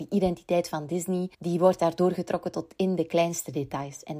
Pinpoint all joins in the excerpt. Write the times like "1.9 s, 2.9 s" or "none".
1.3 s